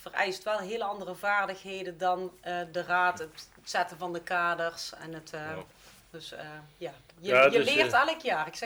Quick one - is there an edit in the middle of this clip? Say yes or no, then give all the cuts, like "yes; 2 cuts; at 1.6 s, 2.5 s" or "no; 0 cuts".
no; 0 cuts